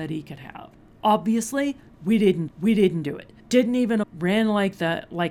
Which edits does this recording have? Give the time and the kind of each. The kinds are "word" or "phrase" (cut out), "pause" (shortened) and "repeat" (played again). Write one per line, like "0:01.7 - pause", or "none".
0:02.5 - repeat
0:03.4 - pause
0:04.0 - word